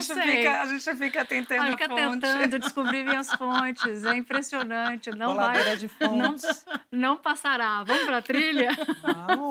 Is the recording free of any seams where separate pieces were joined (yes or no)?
no